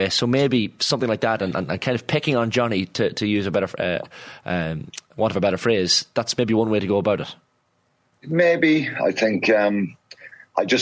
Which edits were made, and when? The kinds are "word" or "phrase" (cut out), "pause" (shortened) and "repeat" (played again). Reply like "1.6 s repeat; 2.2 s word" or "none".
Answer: none

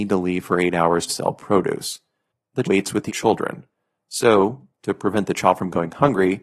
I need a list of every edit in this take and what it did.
1.1 s phrase; 2.6 s word; 3.1 s word

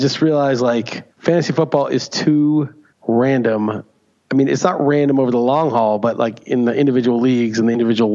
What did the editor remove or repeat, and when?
1.1 s pause; 2.9 s pause

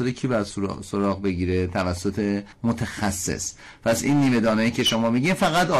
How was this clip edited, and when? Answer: 2.5 s pause

